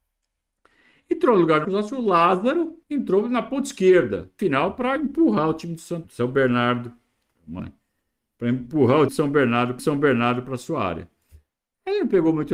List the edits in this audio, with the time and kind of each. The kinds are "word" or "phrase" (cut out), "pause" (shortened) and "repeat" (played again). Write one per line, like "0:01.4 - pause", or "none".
0:01.6 - word
0:02.8 - pause
0:04.4 - phrase
0:06.0 - word
0:07.6 - phrase
0:09.1 - word
0:09.8 - repeat